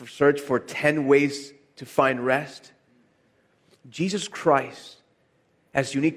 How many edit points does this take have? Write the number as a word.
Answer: zero